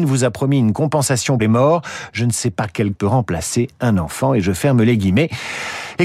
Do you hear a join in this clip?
yes; 2 cuts; at 1.4 s, 2.9 s

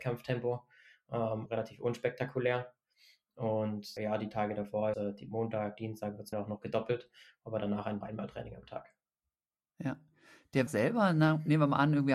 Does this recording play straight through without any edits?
no; 6 cuts; at 1.5 s, 4.0 s, 4.9 s, 6.3 s, 8.0 s, 10.7 s

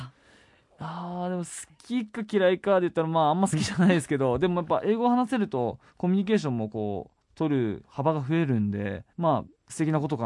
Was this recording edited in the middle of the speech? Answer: yes; 1 cut; at 9.1 s

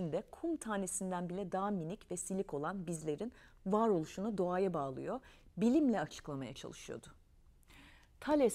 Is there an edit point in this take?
no; 0 cuts

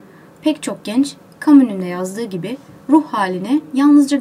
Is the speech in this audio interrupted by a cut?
no; 0 cuts

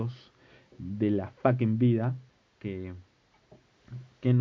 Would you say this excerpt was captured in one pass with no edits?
no; 1 cut; at 2.3 s

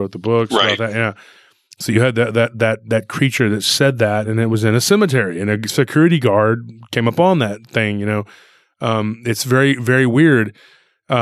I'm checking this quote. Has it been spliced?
no; 0 cuts

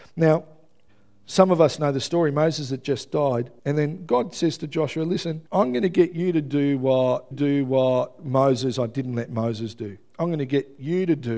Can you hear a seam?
yes; 3 cuts; at 3.6 s, 5.5 s, 7.3 s

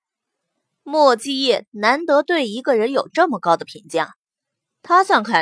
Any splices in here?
no; 0 cuts

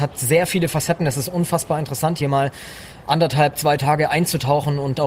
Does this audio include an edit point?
no; 0 cuts

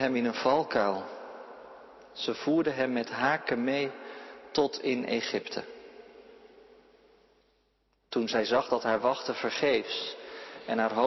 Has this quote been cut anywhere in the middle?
no; 0 cuts

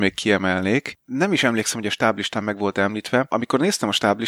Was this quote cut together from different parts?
no; 0 cuts

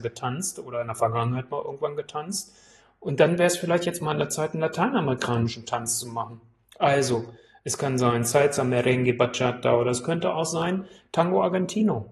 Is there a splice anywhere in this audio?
no; 0 cuts

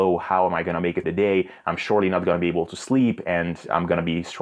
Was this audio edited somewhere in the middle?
yes; 1 cut; at 1.0 s

